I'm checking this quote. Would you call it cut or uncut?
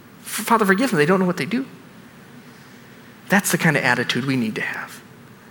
uncut